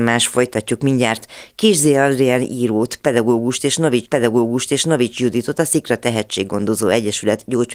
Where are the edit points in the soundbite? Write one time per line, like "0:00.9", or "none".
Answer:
0:04.1